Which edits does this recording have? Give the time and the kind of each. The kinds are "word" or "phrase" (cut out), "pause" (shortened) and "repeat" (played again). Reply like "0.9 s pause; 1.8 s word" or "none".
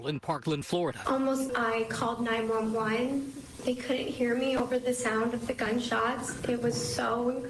1.5 s word